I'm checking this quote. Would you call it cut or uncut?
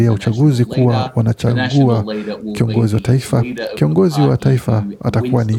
uncut